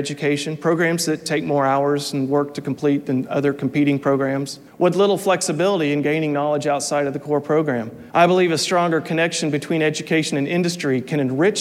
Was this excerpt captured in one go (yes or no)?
no